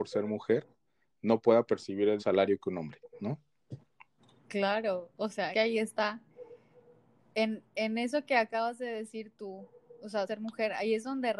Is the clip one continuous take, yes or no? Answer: no